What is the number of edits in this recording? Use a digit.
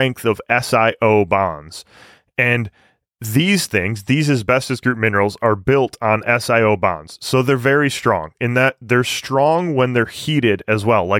0